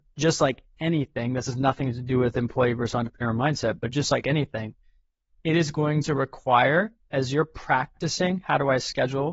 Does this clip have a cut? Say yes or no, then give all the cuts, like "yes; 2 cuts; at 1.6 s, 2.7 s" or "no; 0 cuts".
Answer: no; 0 cuts